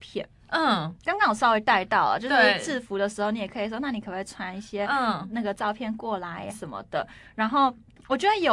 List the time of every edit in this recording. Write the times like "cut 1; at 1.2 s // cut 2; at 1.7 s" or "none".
cut 1; at 6.5 s

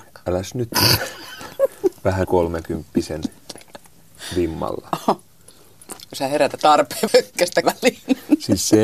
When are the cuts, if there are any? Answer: cut 1; at 2.2 s // cut 2; at 6.1 s // cut 3; at 6.6 s // cut 4; at 7.1 s // cut 5; at 7.6 s

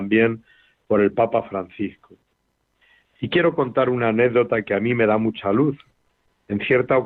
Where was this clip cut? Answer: none

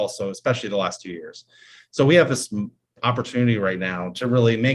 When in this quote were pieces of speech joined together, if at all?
none

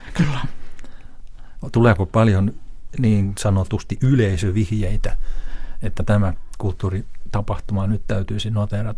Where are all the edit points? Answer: cut 1; at 6.0 s

